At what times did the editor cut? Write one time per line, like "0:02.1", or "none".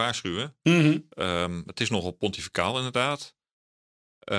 none